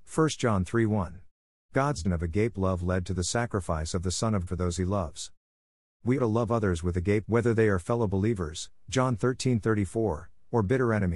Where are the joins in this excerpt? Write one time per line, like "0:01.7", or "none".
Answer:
0:02.0
0:04.5
0:06.2
0:07.2